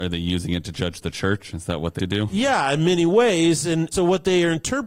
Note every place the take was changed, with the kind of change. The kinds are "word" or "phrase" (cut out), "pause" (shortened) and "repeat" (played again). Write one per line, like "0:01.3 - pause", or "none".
0:02.0 - word
0:03.9 - word

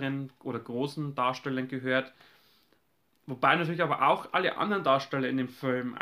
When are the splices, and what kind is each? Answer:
none

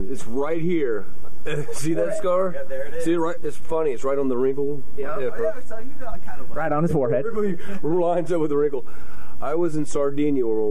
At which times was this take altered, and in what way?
none

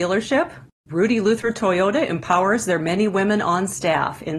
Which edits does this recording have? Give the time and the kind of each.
none

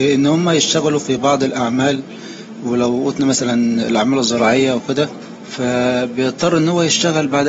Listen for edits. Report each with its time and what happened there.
none

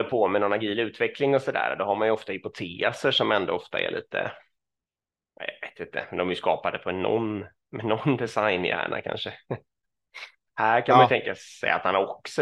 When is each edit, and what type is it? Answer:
none

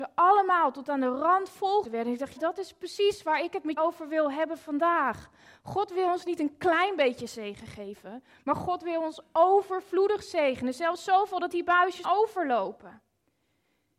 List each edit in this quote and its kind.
0:01.8 - word
0:02.4 - word
0:03.8 - word
0:12.0 - word

